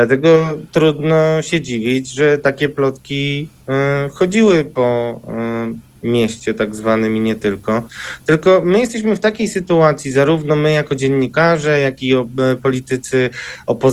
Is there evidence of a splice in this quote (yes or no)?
no